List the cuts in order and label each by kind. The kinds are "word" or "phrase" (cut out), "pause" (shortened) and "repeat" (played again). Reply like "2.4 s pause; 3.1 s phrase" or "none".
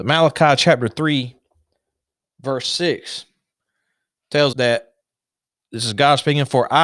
4.5 s word